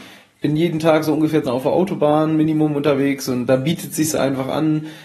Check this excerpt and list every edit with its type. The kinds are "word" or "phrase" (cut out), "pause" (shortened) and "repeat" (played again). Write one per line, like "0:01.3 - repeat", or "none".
0:01.4 - phrase